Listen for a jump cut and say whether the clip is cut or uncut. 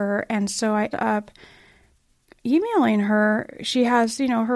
cut